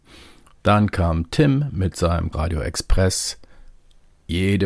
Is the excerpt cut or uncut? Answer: cut